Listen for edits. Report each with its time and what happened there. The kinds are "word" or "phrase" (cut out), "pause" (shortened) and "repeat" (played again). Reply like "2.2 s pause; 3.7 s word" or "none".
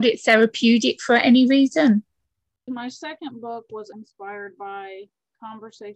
2.7 s phrase; 3.9 s word